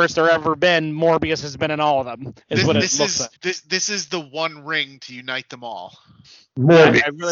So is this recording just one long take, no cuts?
no; 2 cuts; at 2.4 s, 3.4 s

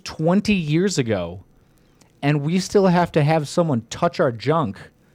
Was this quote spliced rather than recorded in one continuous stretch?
no; 0 cuts

